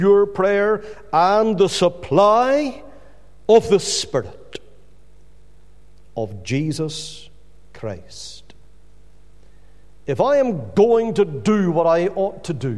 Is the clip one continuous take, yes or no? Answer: yes